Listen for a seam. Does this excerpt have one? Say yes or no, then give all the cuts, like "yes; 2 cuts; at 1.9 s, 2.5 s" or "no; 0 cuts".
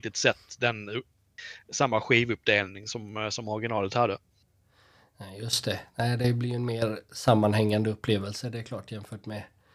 no; 0 cuts